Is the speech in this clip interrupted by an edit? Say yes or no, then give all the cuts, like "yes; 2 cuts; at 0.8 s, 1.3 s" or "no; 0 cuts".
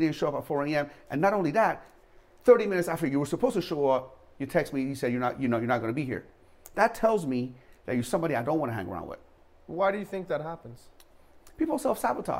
no; 0 cuts